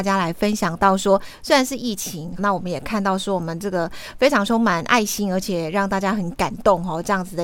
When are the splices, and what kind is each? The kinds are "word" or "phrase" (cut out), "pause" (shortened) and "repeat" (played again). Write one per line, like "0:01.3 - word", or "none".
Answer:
0:02.4 - word